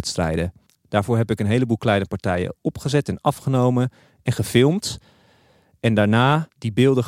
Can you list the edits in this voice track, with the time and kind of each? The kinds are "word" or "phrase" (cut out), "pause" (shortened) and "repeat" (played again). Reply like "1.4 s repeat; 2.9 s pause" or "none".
none